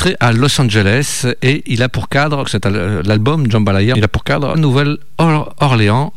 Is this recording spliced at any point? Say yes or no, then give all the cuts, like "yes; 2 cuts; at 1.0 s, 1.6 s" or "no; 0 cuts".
yes; 3 cuts; at 2.4 s, 3.9 s, 4.5 s